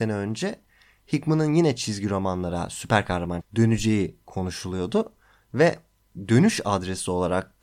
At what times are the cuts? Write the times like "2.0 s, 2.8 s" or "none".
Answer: 3.4 s